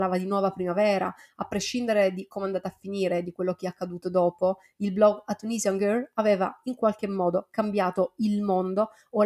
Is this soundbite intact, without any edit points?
yes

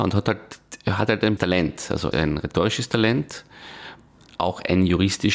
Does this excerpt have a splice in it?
yes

